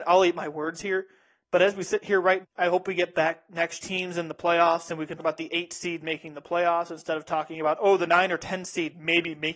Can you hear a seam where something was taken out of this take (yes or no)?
yes